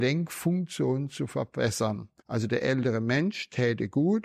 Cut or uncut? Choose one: cut